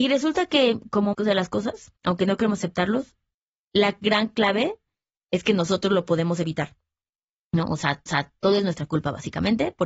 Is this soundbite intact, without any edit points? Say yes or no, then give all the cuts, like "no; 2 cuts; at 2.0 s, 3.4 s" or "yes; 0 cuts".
no; 4 cuts; at 1.1 s, 2.0 s, 3.3 s, 8.1 s